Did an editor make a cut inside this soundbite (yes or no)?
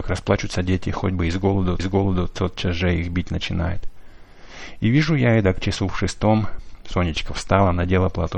yes